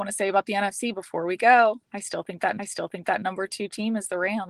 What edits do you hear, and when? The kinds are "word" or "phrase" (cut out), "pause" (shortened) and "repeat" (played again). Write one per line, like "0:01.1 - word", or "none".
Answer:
0:01.8 - pause
0:02.6 - repeat